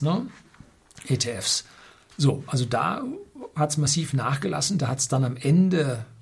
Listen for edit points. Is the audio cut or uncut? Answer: uncut